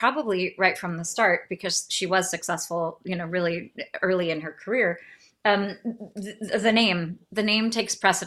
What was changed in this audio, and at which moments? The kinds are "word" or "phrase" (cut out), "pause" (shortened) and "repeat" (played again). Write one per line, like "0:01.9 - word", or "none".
none